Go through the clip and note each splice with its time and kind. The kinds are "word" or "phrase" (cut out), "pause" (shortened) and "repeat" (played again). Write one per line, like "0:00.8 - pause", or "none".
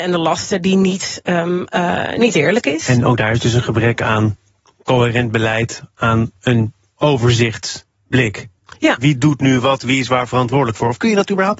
none